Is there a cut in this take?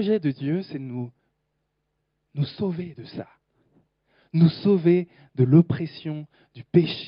no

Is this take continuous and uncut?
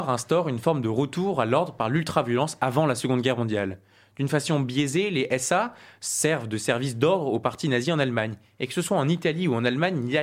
yes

